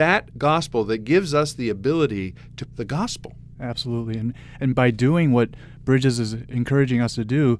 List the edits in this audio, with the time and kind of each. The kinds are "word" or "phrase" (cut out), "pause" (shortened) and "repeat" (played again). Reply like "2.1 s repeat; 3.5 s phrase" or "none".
2.7 s word; 4.7 s word